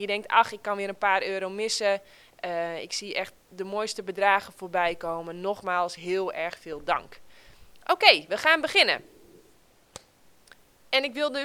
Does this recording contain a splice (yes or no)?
no